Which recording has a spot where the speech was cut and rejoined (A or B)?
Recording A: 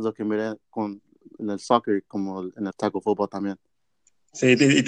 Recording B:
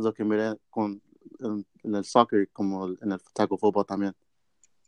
A